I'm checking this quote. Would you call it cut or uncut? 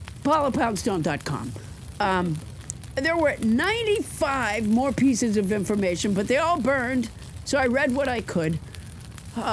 uncut